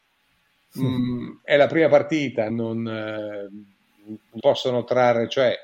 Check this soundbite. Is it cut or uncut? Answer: cut